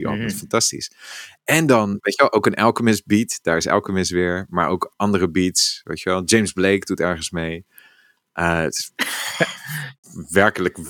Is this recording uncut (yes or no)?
yes